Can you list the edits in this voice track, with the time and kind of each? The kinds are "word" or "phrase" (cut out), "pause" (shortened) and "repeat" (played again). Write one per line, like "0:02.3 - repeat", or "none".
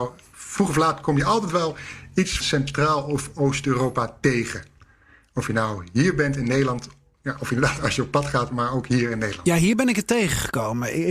0:02.4 - word